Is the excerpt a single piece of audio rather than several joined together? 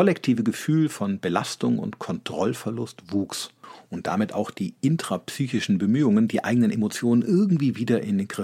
yes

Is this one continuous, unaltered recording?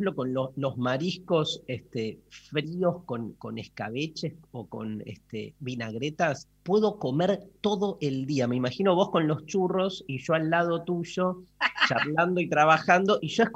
no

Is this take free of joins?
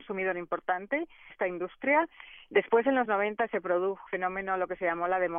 no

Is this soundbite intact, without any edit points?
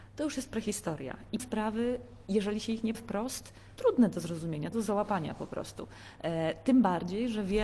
no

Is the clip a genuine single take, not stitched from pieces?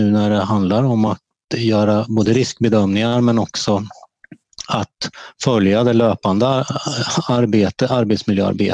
yes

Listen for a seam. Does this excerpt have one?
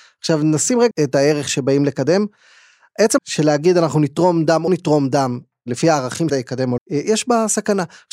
yes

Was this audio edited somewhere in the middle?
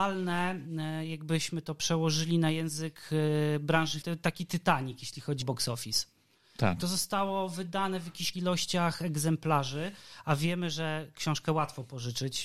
yes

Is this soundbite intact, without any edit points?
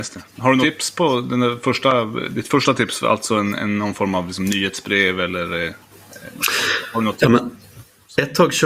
yes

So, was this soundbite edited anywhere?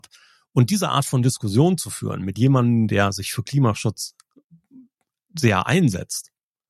no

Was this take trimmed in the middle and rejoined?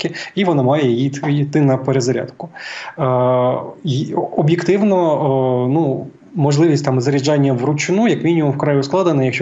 no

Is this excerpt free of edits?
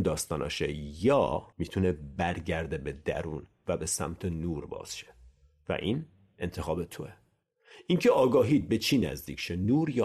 no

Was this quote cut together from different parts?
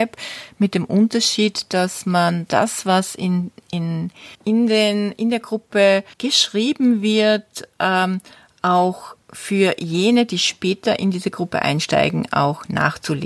yes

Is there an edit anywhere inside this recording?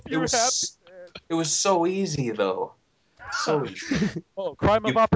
no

